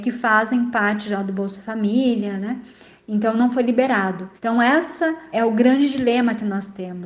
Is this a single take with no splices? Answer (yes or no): no